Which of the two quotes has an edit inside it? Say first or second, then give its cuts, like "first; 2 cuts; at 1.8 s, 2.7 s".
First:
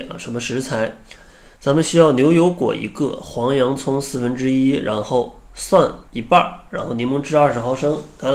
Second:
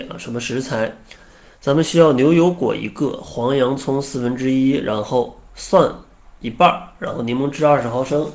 first; 1 cut; at 6.1 s